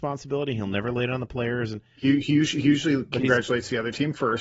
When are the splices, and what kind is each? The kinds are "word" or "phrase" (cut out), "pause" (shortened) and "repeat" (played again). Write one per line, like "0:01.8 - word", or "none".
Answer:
0:01.9 - pause